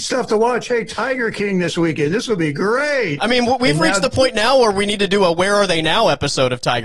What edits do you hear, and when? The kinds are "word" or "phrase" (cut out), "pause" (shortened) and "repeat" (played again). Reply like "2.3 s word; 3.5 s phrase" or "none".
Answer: none